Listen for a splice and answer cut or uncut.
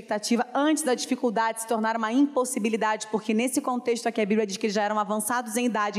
uncut